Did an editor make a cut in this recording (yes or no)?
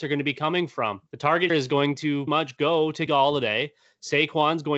yes